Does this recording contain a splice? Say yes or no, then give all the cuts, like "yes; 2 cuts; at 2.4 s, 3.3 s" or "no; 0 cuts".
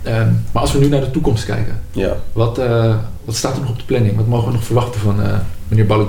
no; 0 cuts